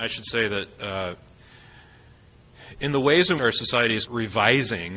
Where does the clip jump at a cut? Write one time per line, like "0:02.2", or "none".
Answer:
0:02.8
0:03.4
0:04.1